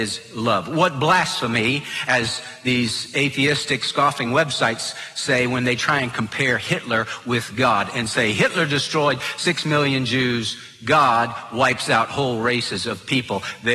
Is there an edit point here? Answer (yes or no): no